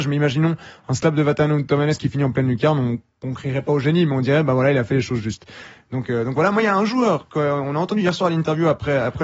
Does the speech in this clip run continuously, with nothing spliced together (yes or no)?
yes